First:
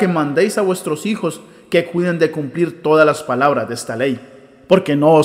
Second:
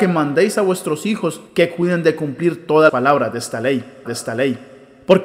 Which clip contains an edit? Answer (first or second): second